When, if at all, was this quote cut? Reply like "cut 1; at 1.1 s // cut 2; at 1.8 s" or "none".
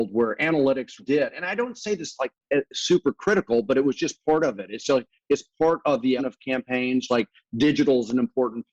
cut 1; at 1.0 s // cut 2; at 6.2 s // cut 3; at 7.1 s